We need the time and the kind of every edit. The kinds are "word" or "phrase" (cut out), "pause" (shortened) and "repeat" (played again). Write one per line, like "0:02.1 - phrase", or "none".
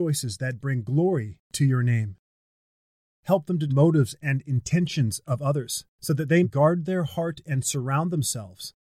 0:01.4 - pause
0:03.7 - phrase
0:05.9 - pause
0:06.4 - word